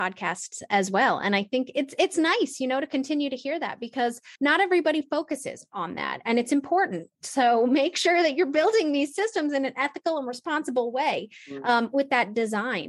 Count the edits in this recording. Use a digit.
1